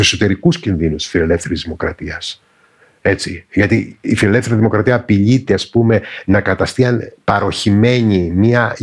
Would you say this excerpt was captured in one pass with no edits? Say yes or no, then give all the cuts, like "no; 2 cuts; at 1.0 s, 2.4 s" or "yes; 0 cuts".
yes; 0 cuts